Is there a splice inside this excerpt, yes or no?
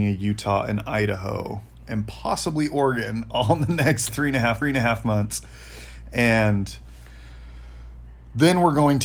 yes